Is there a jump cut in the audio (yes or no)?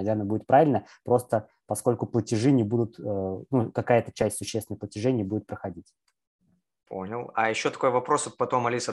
no